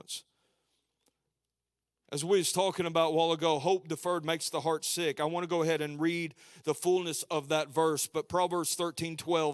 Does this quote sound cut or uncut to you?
uncut